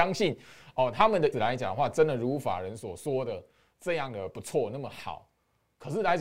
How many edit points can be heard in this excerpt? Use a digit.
1